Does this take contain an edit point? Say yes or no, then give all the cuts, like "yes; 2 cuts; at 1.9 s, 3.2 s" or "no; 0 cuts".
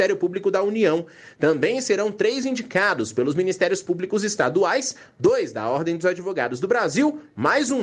no; 0 cuts